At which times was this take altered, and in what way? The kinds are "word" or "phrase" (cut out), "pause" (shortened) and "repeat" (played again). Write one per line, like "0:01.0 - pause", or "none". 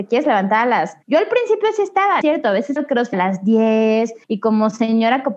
0:01.0 - pause
0:02.2 - phrase
0:02.8 - word
0:03.1 - word
0:04.2 - pause